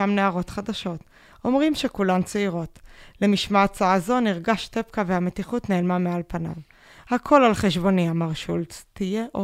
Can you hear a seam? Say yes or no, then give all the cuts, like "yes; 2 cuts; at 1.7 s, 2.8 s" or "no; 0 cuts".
no; 0 cuts